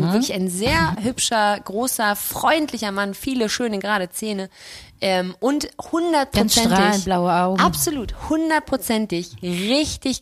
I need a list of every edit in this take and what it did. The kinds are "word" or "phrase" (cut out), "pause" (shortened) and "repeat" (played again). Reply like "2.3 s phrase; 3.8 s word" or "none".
none